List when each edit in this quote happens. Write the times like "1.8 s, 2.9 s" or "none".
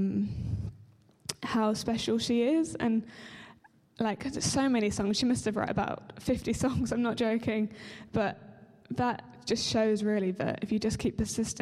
none